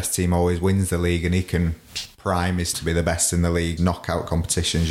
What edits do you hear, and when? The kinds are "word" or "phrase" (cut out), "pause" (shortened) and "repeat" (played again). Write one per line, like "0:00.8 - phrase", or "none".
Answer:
0:02.7 - word
0:03.8 - word